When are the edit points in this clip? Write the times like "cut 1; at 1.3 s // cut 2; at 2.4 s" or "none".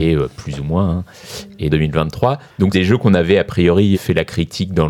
cut 1; at 1.7 s // cut 2; at 2.7 s // cut 3; at 3.9 s